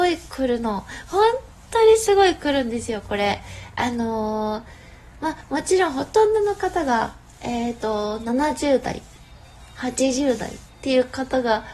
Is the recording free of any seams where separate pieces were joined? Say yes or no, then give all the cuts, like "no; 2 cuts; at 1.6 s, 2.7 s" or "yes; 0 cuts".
no; 1 cut; at 10.7 s